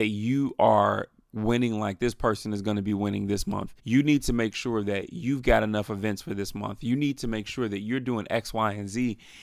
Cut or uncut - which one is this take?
cut